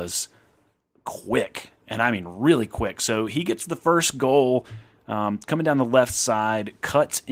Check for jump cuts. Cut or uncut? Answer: uncut